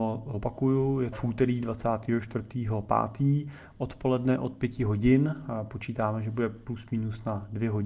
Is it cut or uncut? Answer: cut